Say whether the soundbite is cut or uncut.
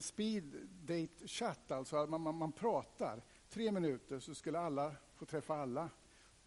uncut